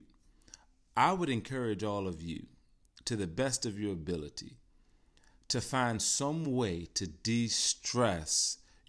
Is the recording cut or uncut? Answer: uncut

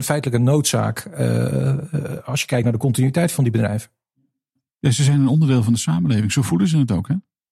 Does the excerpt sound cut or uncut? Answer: uncut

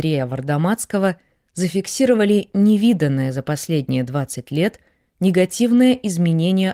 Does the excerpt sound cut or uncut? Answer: uncut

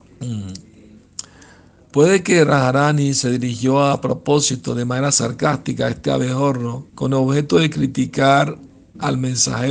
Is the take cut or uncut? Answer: cut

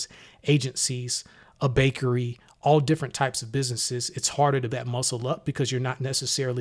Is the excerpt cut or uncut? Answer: cut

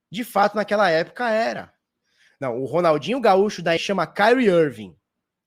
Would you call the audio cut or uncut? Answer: cut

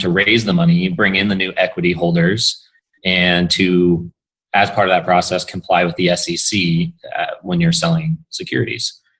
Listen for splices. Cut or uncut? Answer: uncut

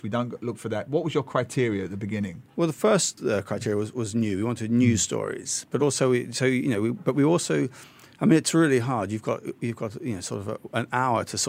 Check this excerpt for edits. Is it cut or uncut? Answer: uncut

